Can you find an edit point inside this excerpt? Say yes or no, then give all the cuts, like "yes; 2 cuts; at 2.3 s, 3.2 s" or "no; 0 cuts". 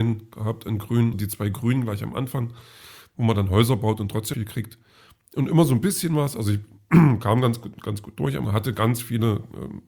yes; 3 cuts; at 1.1 s, 4.3 s, 8.4 s